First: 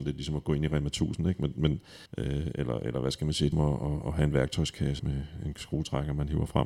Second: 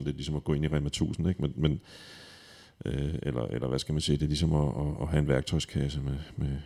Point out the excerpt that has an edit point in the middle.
first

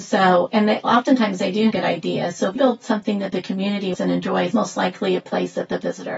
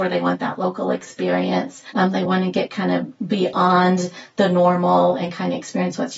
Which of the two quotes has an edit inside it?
first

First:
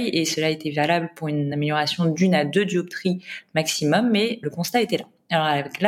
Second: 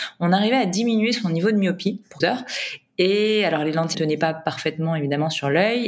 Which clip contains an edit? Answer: second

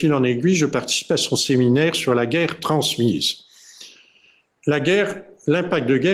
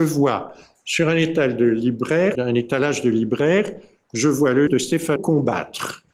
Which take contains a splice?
second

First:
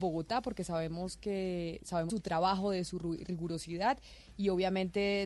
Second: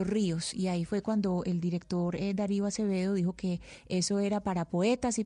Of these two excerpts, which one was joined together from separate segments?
first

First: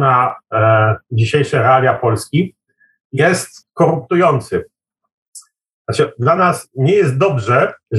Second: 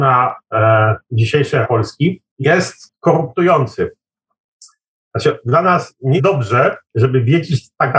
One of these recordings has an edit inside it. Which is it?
second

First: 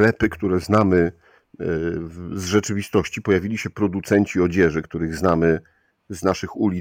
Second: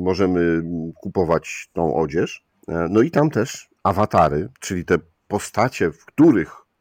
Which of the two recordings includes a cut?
second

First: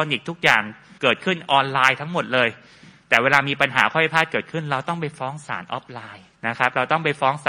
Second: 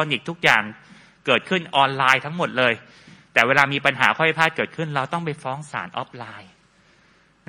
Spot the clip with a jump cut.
first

